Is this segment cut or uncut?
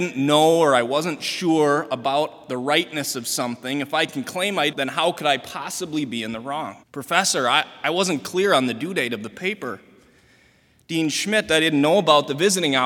cut